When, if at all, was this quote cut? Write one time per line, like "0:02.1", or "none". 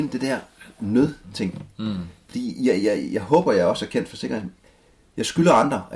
none